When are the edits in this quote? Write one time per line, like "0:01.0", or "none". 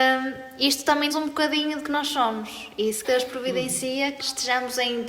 0:01.1
0:01.8
0:03.0
0:04.2